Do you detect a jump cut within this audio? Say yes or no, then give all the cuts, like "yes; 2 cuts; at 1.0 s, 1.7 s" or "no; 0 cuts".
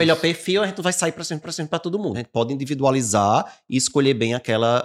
yes; 2 cuts; at 1.4 s, 2.1 s